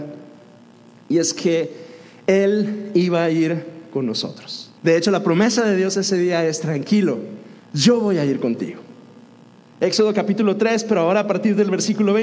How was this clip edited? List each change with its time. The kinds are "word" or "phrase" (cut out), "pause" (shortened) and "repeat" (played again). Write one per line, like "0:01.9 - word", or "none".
0:04.8 - pause
0:07.6 - pause